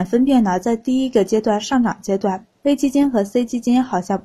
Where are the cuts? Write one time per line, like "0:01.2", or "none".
0:02.5